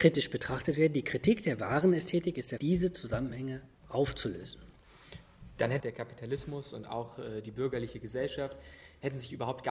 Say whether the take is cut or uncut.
cut